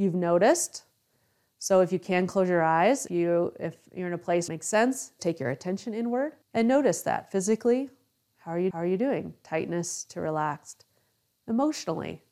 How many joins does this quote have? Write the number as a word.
five